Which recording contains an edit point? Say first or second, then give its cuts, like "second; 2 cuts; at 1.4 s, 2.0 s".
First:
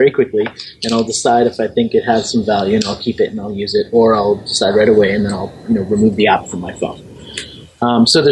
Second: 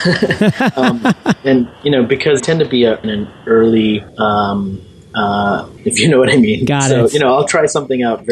second; 4 cuts; at 2.4 s, 3.0 s, 4.1 s, 5.8 s